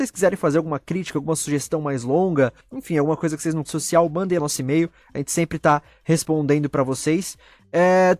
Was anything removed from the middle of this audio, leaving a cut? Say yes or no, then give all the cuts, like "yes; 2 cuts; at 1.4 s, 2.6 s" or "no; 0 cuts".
yes; 3 cuts; at 2.6 s, 3.7 s, 4.4 s